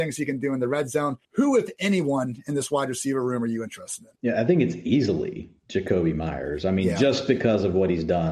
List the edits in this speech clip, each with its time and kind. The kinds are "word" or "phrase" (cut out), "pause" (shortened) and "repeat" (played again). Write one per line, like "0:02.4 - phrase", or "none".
0:01.2 - pause
0:04.2 - pause